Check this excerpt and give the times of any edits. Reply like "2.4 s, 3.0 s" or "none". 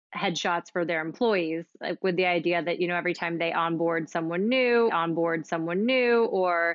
4.9 s